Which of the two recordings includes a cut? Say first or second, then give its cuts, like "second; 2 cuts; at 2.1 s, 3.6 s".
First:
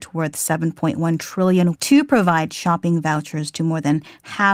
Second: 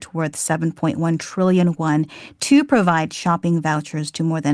first; 1 cut; at 1.8 s